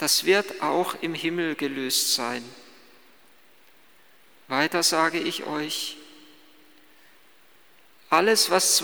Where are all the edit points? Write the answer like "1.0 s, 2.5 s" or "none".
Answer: none